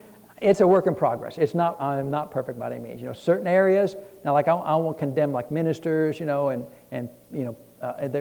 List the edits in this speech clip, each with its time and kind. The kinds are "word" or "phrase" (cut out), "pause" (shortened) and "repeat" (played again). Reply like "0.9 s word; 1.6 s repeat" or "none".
none